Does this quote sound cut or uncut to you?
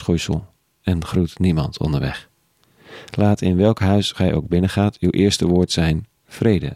uncut